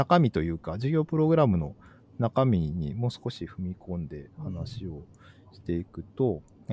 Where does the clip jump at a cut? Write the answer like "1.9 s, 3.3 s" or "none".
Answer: none